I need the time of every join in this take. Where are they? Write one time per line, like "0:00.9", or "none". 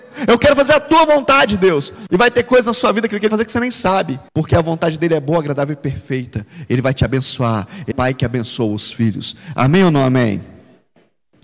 0:03.3
0:04.3
0:07.9